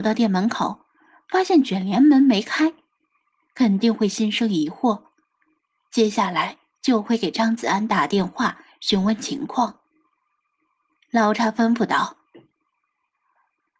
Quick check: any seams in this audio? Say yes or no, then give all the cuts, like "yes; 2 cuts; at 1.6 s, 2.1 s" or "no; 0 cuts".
no; 0 cuts